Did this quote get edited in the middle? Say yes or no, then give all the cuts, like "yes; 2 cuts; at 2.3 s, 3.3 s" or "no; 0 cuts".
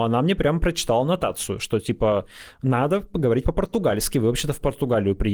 no; 0 cuts